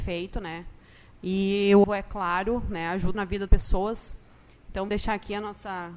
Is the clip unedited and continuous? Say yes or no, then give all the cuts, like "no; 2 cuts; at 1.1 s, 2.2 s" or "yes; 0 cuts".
no; 4 cuts; at 1.8 s, 3.1 s, 3.5 s, 4.9 s